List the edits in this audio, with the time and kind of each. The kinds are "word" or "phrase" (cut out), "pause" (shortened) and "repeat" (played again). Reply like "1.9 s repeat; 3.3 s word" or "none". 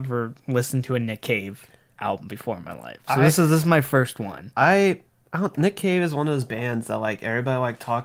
none